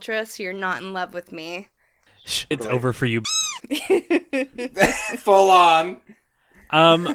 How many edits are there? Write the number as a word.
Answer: one